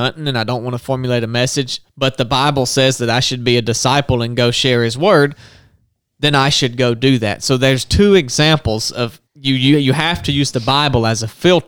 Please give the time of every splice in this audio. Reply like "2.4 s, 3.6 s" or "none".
9.3 s